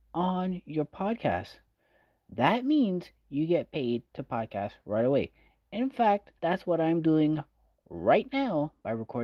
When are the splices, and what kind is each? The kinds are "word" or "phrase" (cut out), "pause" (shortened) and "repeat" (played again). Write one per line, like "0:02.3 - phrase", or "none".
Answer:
0:06.4 - pause